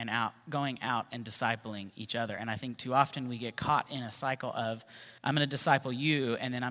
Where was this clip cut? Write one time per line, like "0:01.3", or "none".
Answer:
0:05.2